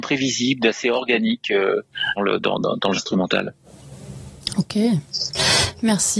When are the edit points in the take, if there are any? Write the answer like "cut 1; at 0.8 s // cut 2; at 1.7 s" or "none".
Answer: cut 1; at 2.2 s // cut 2; at 3.0 s